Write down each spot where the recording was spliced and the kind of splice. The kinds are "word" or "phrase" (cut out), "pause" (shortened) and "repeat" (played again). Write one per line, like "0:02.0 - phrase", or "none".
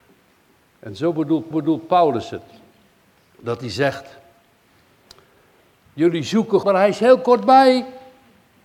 0:01.5 - repeat
0:06.6 - word